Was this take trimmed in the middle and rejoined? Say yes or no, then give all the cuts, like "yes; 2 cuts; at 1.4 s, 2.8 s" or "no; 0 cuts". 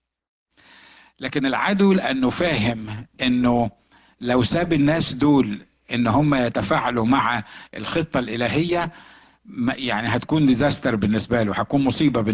no; 0 cuts